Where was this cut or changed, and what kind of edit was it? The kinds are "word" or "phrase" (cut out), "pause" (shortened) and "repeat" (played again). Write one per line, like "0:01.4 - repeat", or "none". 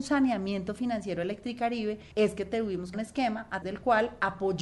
0:02.1 - pause
0:02.9 - phrase
0:03.6 - word